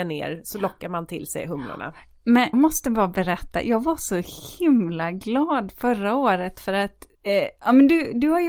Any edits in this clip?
yes; 2 cuts; at 2.5 s, 7.1 s

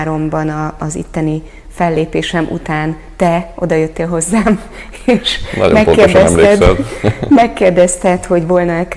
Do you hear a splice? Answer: no; 0 cuts

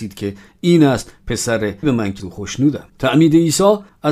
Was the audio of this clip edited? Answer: yes; 3 cuts; at 1.8 s, 2.2 s, 2.9 s

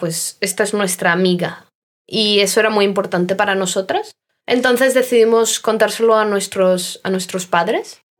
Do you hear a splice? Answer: no; 0 cuts

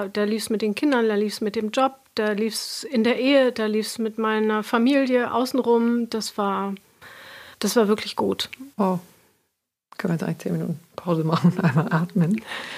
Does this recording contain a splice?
yes; 2 cuts; at 7.5 s, 8.7 s

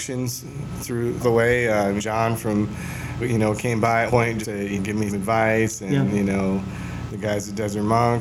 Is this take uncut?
no; 8 cuts; at 1.2 s, 2.0 s, 3.2 s, 4.1 s, 4.4 s, 4.8 s, 5.1 s, 7.1 s

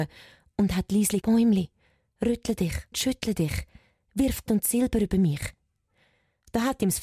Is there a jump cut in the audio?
yes; 3 cuts; at 1.2 s, 2.9 s, 4.5 s

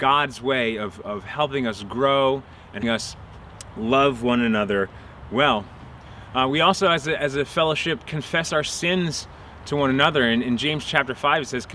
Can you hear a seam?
yes; 1 cut; at 2.8 s

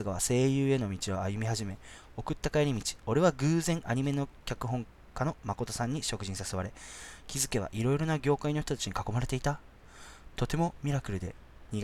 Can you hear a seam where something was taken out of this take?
no; 0 cuts

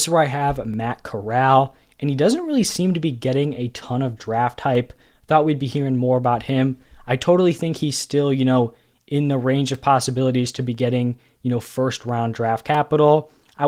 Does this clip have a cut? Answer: no; 0 cuts

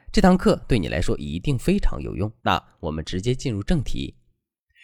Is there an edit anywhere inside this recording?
yes; 1 cut; at 2.4 s

